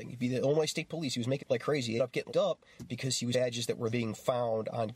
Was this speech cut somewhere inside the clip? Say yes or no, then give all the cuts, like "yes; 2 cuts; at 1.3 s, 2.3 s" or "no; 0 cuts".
yes; 5 cuts; at 1.4 s, 2.0 s, 2.3 s, 3.3 s, 3.9 s